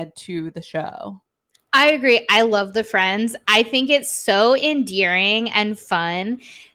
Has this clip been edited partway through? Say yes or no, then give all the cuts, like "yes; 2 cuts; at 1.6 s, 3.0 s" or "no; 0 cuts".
no; 0 cuts